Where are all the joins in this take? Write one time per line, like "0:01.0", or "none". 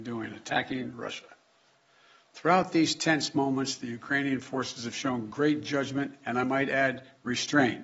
none